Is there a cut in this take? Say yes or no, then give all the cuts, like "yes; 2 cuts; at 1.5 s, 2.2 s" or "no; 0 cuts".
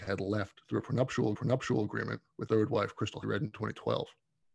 yes; 3 cuts; at 1.3 s, 2.5 s, 3.2 s